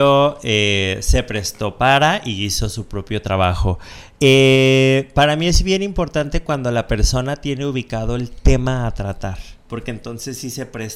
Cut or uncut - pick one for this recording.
cut